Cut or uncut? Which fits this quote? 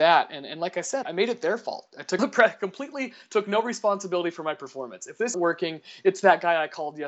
cut